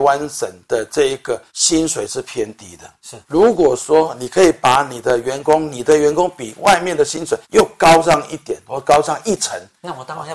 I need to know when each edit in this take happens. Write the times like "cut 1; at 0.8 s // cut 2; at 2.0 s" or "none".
cut 1; at 1.5 s // cut 2; at 3.2 s // cut 3; at 7.4 s

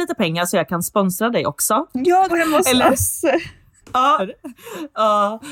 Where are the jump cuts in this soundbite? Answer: cut 1; at 2.3 s // cut 2; at 3.8 s // cut 3; at 4.2 s

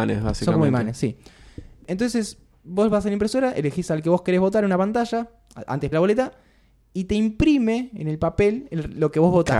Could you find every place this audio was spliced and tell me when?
cut 1; at 5.9 s

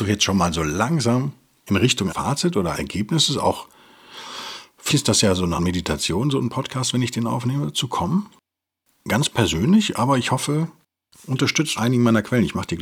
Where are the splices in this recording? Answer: cut 1; at 2.1 s // cut 2; at 2.7 s // cut 3; at 4.9 s // cut 4; at 5.6 s // cut 5; at 11.8 s

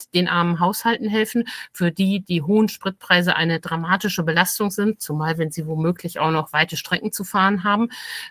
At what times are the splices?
none

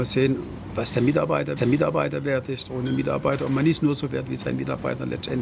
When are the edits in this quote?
cut 1; at 1.6 s // cut 2; at 2.7 s // cut 3; at 4.1 s

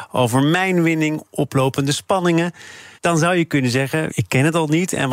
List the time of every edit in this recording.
cut 1; at 3.0 s // cut 2; at 4.1 s

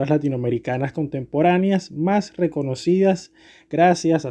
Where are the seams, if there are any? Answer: none

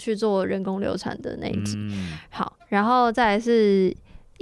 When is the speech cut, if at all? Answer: none

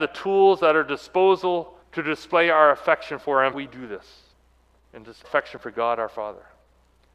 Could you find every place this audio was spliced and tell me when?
cut 1; at 1.8 s // cut 2; at 3.5 s // cut 3; at 4.3 s // cut 4; at 5.2 s

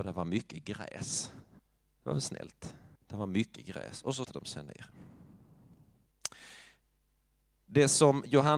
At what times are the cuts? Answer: cut 1; at 1.6 s // cut 2; at 3.0 s // cut 3; at 4.2 s

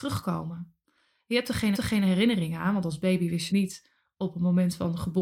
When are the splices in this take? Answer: cut 1; at 1.7 s // cut 2; at 3.5 s

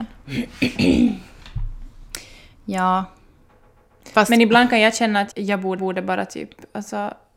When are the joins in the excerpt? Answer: cut 1; at 5.3 s // cut 2; at 5.8 s

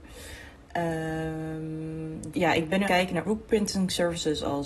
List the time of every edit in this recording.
cut 1; at 2.3 s // cut 2; at 2.9 s // cut 3; at 3.2 s

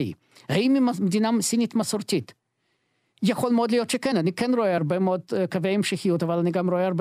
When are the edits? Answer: none

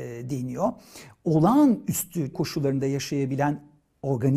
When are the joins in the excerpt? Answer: cut 1; at 2.3 s

